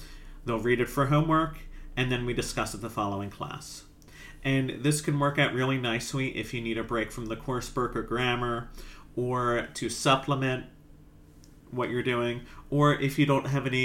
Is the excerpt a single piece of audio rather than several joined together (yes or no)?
yes